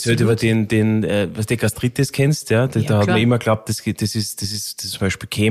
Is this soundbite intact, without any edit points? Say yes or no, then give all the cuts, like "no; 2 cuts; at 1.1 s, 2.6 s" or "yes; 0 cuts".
yes; 0 cuts